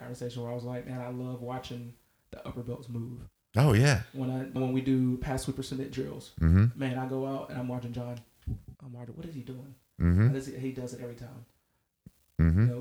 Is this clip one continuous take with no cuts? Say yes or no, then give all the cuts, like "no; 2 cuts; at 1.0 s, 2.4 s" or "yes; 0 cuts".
no; 2 cuts; at 4.6 s, 8.7 s